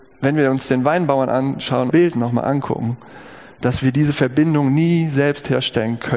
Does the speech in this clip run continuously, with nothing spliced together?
no; 1 cut; at 1.9 s

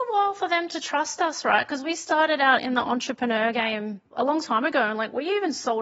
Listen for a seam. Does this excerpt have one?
no; 0 cuts

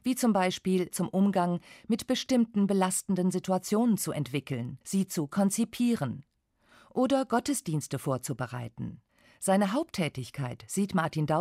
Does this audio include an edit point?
yes; 3 cuts; at 0.9 s, 4.8 s, 9.1 s

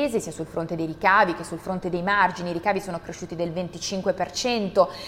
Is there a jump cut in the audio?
no; 0 cuts

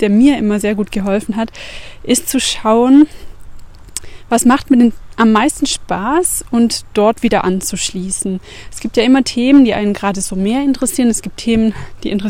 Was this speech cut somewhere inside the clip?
no; 0 cuts

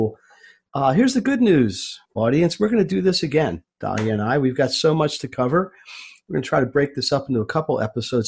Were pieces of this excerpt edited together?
yes; 1 cut; at 2.0 s

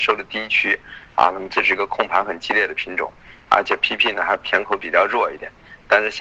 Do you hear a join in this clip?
no; 0 cuts

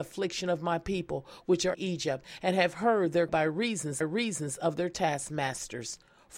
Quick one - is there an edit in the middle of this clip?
yes; 3 cuts; at 1.7 s, 3.3 s, 4.0 s

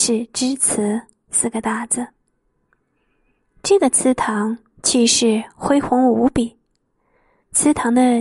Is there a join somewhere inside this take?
no; 0 cuts

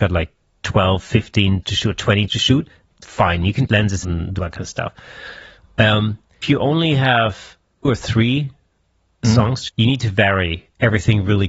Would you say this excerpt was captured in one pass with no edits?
no; 8 cuts; at 1.6 s, 2.3 s, 3.7 s, 4.0 s, 4.4 s, 6.4 s, 7.8 s, 9.7 s

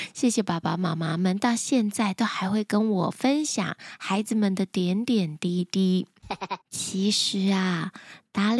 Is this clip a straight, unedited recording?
no; 1 cut; at 6.6 s

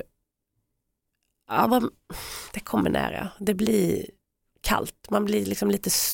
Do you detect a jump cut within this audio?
no; 0 cuts

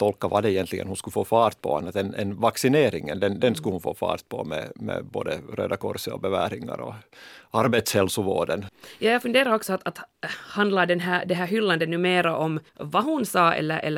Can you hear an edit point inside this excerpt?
yes; 1 cut; at 12.7 s

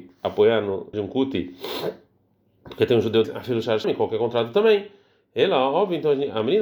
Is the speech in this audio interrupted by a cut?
yes; 3 cuts; at 0.9 s, 3.2 s, 3.8 s

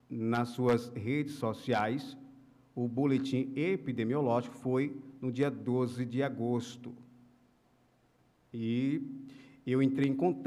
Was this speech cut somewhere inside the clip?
no; 0 cuts

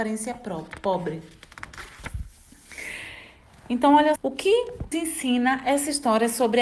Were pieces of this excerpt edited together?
yes; 2 cuts; at 4.2 s, 4.9 s

